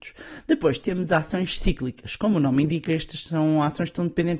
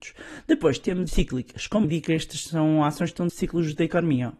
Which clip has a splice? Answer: second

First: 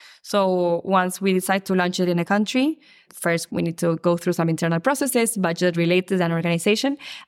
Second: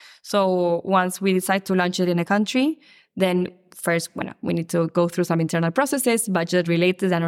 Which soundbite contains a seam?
first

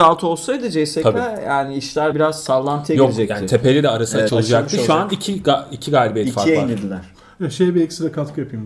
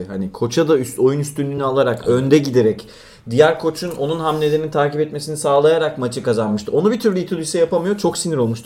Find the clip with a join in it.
first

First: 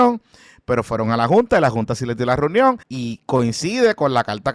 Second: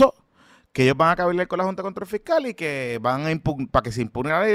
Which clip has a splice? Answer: first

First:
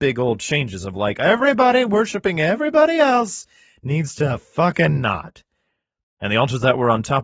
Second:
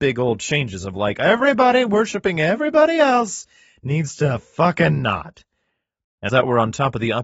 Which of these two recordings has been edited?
second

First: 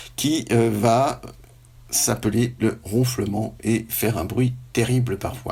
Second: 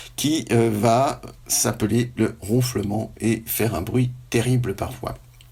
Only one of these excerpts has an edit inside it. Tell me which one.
second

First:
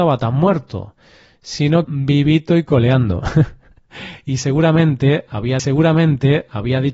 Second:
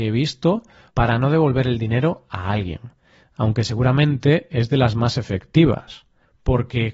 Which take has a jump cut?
first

